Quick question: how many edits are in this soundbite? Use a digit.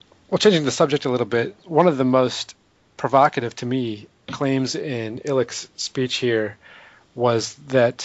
0